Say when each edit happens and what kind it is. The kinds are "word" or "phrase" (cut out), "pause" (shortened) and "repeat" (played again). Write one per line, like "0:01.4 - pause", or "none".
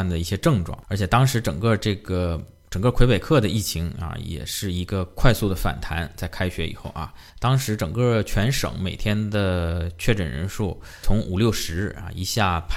0:07.3 - pause